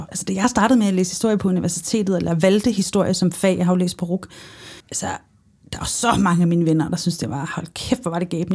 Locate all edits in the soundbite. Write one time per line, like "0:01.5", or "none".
0:04.8